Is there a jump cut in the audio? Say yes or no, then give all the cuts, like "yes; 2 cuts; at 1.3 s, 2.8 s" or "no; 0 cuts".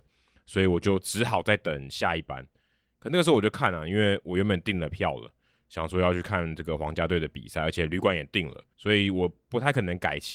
yes; 1 cut; at 8.7 s